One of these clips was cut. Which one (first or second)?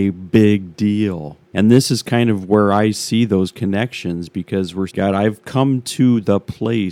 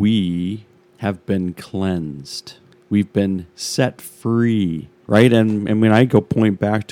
first